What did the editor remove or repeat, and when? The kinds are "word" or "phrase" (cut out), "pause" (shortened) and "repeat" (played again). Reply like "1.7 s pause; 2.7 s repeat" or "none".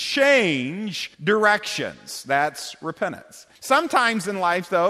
1.1 s pause; 3.6 s pause